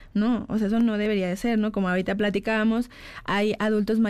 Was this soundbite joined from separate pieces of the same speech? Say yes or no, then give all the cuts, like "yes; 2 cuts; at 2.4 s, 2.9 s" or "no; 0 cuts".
no; 0 cuts